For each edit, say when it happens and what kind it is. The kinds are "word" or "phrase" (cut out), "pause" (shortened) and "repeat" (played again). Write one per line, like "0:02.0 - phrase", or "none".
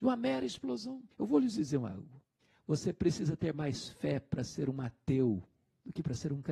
0:01.1 - pause
0:02.4 - pause